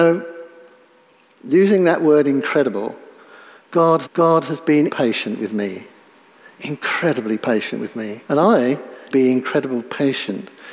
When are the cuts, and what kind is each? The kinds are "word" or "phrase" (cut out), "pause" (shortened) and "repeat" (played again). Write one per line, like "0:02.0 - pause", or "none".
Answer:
0:04.0 - repeat
0:04.9 - word
0:08.2 - pause
0:09.1 - phrase